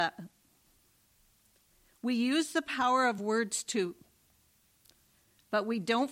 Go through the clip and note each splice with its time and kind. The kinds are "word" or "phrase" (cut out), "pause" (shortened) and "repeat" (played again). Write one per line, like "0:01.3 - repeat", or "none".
none

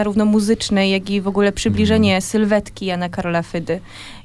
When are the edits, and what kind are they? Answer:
none

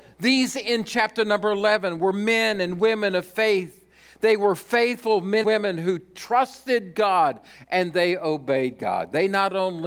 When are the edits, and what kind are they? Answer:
0:05.4 - word

